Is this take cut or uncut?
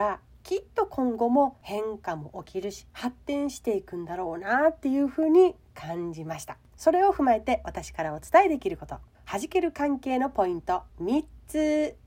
cut